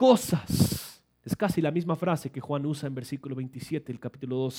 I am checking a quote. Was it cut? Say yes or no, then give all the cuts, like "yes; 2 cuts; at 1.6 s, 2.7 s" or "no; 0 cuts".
yes; 1 cut; at 1.1 s